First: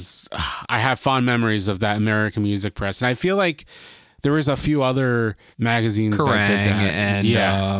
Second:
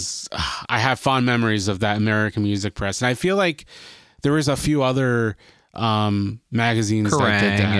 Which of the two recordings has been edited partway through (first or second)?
first